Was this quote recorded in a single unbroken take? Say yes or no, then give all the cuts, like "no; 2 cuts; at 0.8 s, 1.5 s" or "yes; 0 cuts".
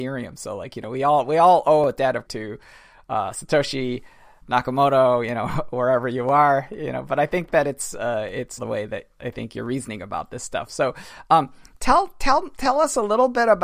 no; 2 cuts; at 2.3 s, 8.6 s